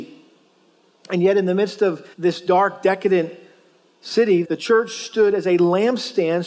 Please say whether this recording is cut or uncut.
cut